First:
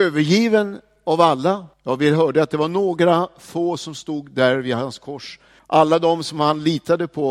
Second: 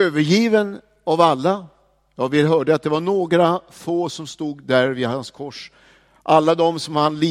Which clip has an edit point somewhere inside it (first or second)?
first